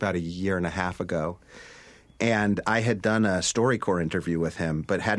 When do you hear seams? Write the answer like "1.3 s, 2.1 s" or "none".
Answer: none